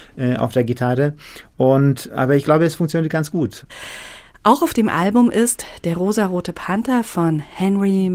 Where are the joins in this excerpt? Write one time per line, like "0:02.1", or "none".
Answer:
none

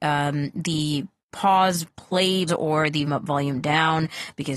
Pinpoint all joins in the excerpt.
0:01.3
0:02.5
0:03.1

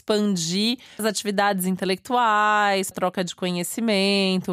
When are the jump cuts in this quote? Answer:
0:01.0
0:02.9

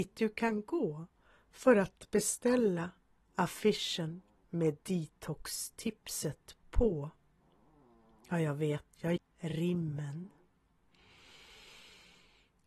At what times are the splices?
0:09.2

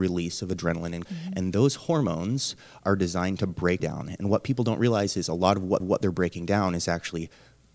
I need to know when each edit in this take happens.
0:01.0
0:03.8
0:05.8

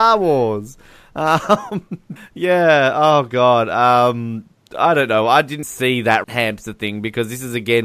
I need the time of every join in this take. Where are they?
0:02.2
0:05.6
0:06.2

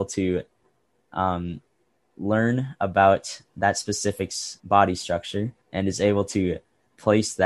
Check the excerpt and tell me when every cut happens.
0:04.6
0:05.6

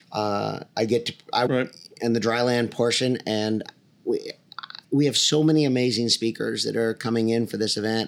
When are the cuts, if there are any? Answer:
0:01.5
0:04.8

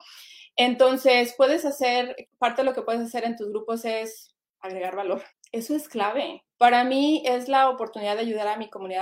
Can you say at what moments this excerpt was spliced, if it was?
0:02.3
0:05.3
0:06.5

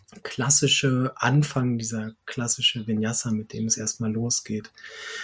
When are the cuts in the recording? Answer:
none

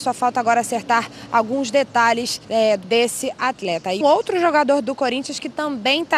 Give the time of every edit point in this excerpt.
0:02.4
0:02.8
0:04.0

